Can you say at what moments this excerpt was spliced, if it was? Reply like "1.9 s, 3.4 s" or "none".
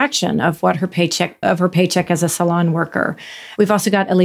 1.4 s

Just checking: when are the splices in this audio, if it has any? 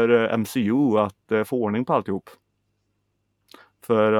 none

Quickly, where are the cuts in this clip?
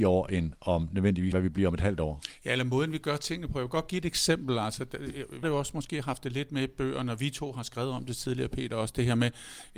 1.3 s, 5.4 s

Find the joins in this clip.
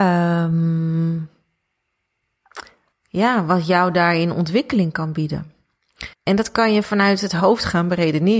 2.9 s, 6.1 s

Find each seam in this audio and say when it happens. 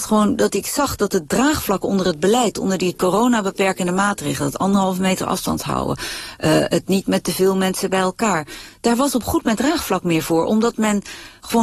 9.6 s

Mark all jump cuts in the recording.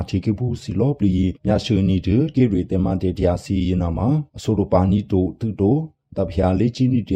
2.3 s

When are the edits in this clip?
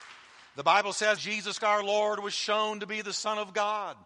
1.2 s, 1.6 s

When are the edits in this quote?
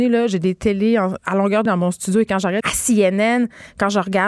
1.2 s, 1.7 s, 2.6 s

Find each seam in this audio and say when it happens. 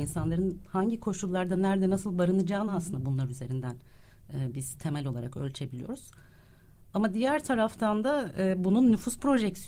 none

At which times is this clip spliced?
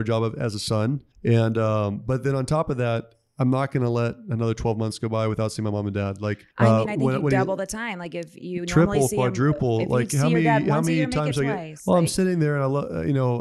1.1 s, 6.5 s

